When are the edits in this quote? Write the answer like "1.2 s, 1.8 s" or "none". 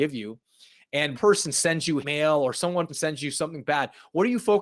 1.1 s, 2.0 s, 2.9 s

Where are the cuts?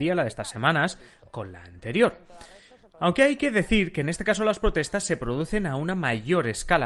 none

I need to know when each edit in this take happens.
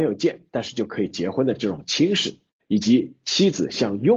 2.5 s

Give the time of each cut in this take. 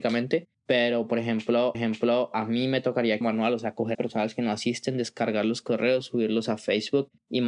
1.7 s, 3.2 s, 3.9 s

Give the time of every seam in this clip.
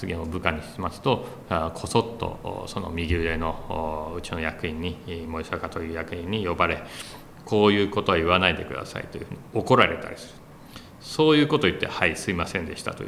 none

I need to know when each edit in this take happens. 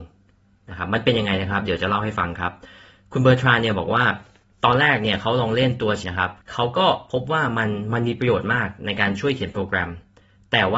6.0 s, 6.4 s

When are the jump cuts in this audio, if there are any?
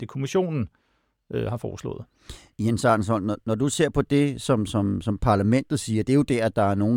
none

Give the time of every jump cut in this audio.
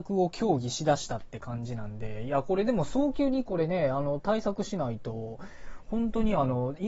none

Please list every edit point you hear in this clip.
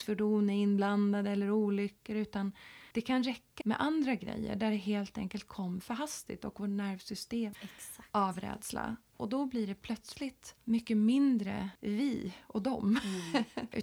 2.9 s, 3.6 s, 7.5 s

